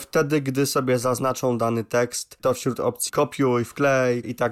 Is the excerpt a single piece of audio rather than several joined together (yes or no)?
no